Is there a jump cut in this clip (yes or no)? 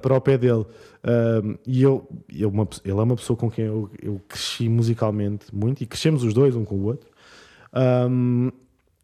no